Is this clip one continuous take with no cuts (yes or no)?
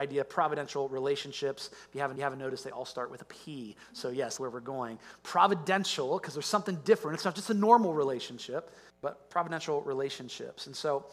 no